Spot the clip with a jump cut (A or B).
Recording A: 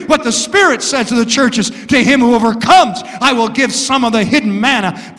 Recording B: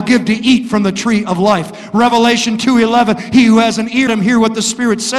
B